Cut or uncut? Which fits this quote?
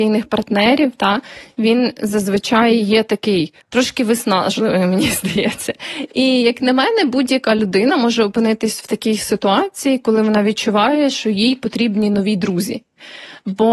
cut